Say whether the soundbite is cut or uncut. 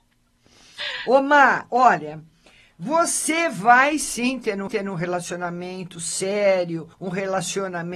cut